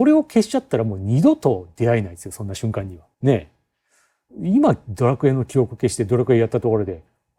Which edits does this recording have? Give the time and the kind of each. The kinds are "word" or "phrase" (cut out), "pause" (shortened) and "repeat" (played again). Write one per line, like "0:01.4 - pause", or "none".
0:03.1 - pause